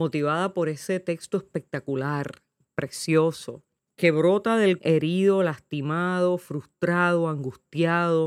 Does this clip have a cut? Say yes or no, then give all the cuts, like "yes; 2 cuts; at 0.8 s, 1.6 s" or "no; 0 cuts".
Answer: yes; 2 cuts; at 3.8 s, 4.8 s